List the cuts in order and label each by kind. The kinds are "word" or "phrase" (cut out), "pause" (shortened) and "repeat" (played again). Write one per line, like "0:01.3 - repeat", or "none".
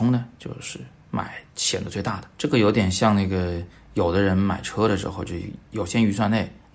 0:01.5 - pause
0:02.3 - pause